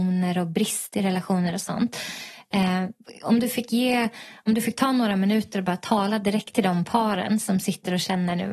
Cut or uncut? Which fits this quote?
uncut